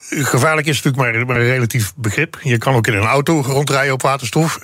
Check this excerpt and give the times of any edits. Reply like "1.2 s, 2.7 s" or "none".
none

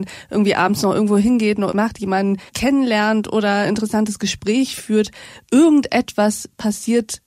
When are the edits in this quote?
1.7 s, 2.5 s, 3.7 s

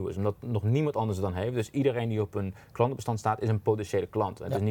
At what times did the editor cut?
none

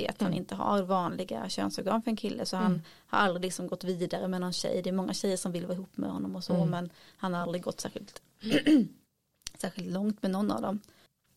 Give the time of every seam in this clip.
none

